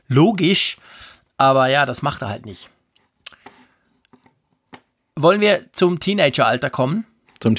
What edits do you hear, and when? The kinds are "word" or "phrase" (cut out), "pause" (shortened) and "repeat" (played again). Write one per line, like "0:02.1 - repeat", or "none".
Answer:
none